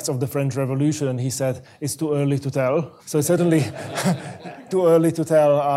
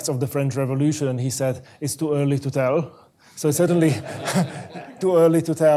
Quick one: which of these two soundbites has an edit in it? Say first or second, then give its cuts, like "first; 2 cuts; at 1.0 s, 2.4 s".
first; 1 cut; at 3.0 s